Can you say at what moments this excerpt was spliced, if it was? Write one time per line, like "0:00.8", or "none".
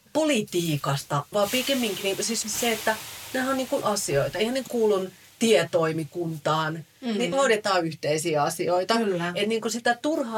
0:01.3
0:02.4
0:03.8
0:04.7
0:07.3